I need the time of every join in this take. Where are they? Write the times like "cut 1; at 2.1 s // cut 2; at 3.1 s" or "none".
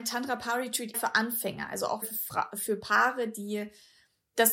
cut 1; at 0.9 s // cut 2; at 2.0 s